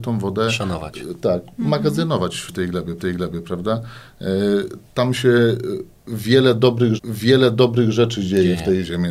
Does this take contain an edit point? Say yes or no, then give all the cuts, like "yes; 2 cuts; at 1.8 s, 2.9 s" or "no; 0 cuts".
yes; 3 cuts; at 2.5 s, 3.0 s, 7.0 s